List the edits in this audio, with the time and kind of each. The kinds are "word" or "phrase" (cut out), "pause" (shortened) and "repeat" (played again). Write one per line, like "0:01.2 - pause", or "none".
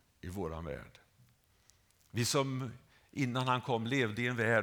none